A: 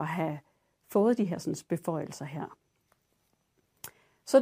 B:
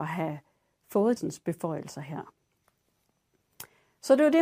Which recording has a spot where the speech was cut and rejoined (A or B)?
B